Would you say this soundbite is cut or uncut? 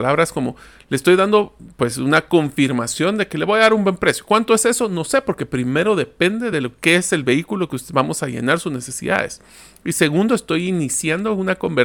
uncut